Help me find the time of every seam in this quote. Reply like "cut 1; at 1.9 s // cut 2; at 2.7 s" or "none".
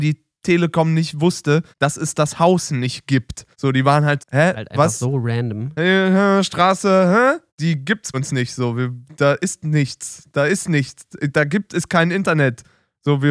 cut 1; at 1.7 s // cut 2; at 3.5 s // cut 3; at 4.2 s // cut 4; at 7.5 s // cut 5; at 8.1 s